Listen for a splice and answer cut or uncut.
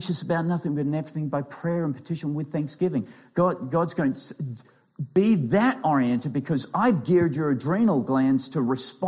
uncut